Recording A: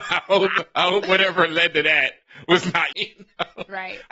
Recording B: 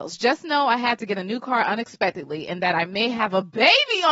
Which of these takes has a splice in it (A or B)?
A